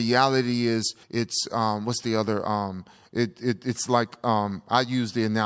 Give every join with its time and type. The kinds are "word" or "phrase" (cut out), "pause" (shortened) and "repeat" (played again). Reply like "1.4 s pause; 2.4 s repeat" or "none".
1.0 s pause